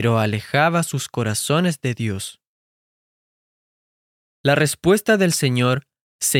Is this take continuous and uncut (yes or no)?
yes